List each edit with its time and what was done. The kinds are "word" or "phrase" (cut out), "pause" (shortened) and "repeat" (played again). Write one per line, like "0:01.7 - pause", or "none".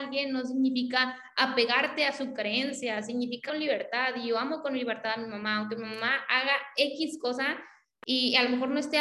0:03.5 - word

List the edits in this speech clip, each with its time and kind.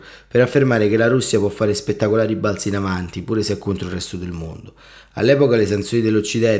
none

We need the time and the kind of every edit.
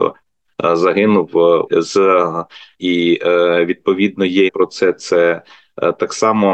0:01.7 - word
0:02.8 - word
0:04.5 - word

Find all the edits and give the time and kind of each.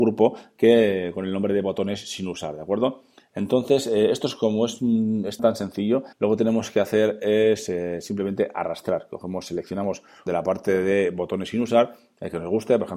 0:05.4 - word
0:06.1 - pause
0:10.3 - phrase

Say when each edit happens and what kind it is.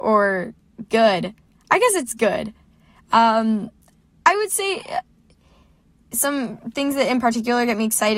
none

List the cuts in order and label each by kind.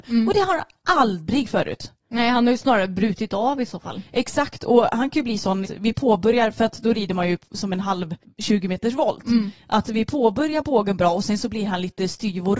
0:01.4 - word
0:05.6 - phrase
0:08.2 - pause

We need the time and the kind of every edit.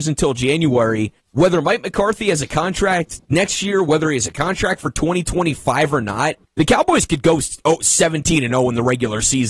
0:01.2 - pause
0:03.2 - pause
0:06.5 - pause

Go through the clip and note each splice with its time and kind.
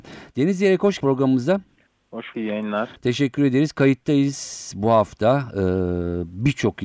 0:01.0 - word
0:02.3 - word

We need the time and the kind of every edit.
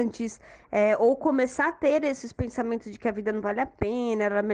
none

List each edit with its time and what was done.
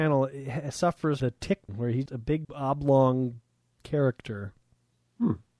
0:01.2 - word
0:01.7 - word
0:02.1 - word
0:02.4 - word

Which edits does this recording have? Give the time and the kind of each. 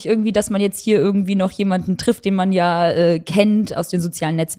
none

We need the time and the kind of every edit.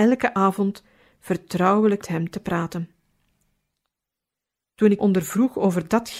0:02.0 - word
0:05.0 - word

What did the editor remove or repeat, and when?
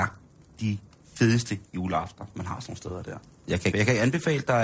0:03.7 - word

